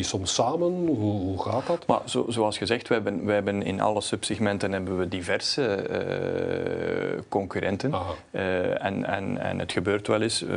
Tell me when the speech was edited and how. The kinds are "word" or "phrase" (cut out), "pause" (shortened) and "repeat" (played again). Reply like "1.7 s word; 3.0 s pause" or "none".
none